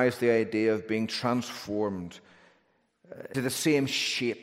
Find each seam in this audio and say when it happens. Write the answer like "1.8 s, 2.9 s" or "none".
3.3 s